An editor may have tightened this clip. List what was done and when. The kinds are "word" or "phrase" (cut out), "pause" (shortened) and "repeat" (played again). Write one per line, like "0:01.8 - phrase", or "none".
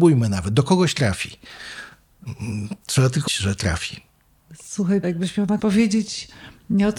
0:03.3 - word
0:05.0 - word
0:05.6 - word